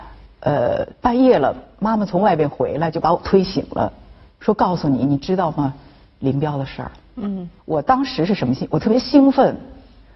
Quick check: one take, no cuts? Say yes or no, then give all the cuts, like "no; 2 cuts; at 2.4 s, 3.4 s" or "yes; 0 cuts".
no; 1 cut; at 7.6 s